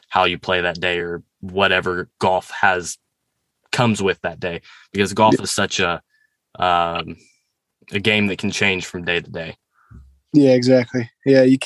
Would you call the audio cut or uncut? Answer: uncut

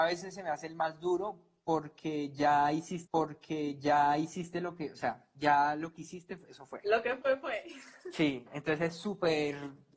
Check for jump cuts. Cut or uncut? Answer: cut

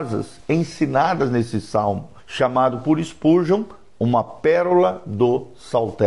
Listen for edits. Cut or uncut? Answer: cut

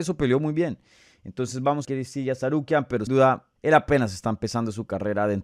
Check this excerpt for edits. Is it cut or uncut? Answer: cut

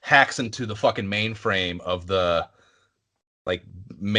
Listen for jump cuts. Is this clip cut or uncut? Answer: uncut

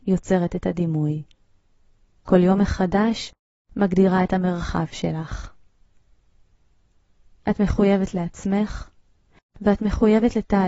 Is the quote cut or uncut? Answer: uncut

